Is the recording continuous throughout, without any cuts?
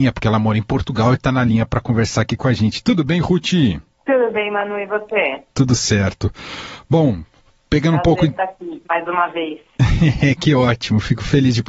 yes; 0 cuts

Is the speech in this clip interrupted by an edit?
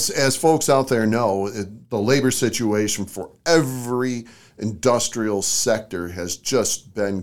no; 0 cuts

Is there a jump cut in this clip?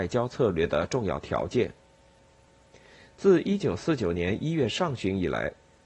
no; 0 cuts

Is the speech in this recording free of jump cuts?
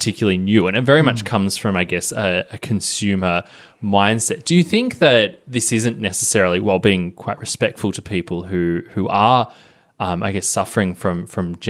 yes; 0 cuts

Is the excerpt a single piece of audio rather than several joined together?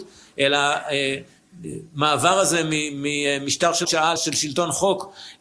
no; 2 cuts; at 3.8 s, 4.2 s

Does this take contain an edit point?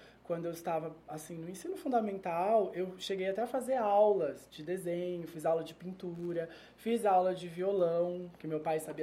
no; 0 cuts

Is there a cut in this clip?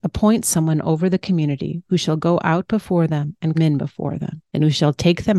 yes; 2 cuts; at 3.5 s, 4.5 s

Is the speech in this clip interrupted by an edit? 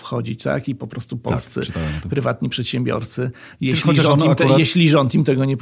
no; 0 cuts

